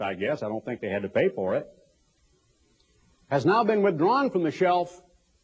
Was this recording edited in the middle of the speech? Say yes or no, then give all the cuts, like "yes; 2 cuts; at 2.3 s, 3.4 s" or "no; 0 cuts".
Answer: no; 0 cuts